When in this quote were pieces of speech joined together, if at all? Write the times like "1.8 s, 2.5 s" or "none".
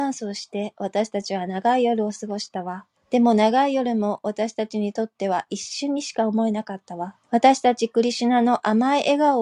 3.0 s, 7.2 s